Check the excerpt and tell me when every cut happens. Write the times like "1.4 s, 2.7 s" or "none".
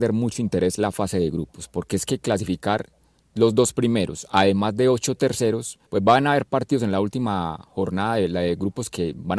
5.9 s